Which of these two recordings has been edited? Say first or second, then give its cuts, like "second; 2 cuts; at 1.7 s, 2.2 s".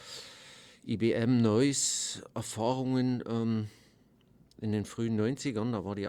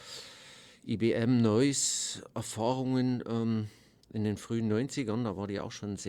second; 1 cut; at 4.0 s